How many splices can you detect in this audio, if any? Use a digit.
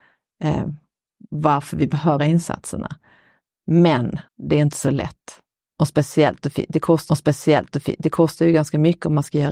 3